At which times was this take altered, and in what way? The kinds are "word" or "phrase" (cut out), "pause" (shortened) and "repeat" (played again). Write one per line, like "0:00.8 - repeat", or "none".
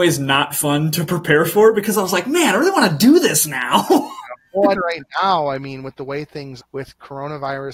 0:04.7 - word
0:06.6 - word

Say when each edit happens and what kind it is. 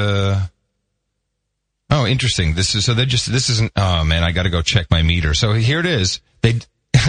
none

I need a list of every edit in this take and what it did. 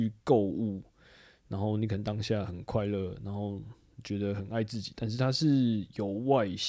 none

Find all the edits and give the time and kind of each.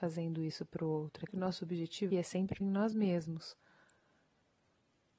0:01.3 - word
0:02.1 - word
0:02.6 - word

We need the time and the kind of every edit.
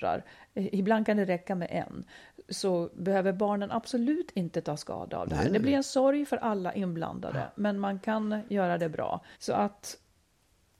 0:09.3 - pause

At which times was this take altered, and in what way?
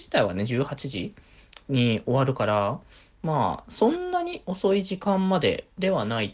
none

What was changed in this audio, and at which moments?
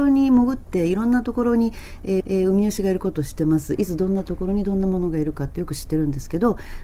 0:02.2 - repeat

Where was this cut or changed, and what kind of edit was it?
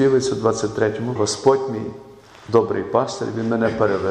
0:01.2 - phrase

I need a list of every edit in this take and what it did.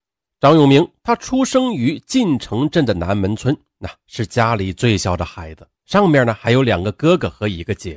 0:05.7 - pause

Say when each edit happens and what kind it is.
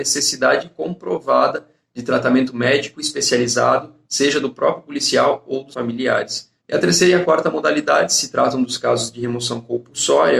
0:05.7 - phrase
0:06.6 - pause

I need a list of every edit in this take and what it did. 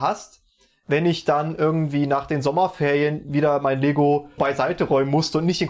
0:04.4 - word

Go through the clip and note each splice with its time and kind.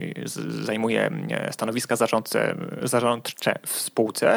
none

